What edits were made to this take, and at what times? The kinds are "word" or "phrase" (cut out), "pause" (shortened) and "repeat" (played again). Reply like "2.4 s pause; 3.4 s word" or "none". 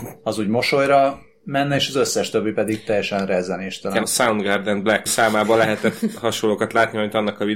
4.0 s word; 5.1 s phrase